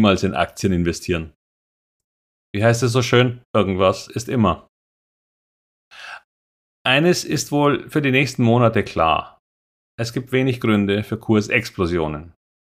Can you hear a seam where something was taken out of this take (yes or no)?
yes